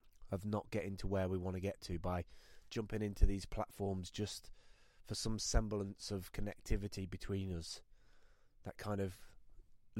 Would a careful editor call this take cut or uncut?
uncut